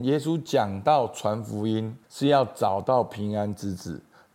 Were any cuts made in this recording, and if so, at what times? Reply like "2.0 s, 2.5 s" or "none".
2.0 s